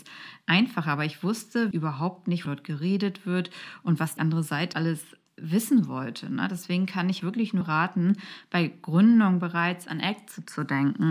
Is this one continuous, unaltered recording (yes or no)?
no